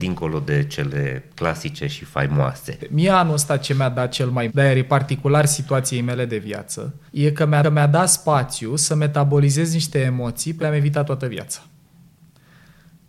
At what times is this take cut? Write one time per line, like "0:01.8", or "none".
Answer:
0:04.5
0:07.1
0:07.6
0:10.6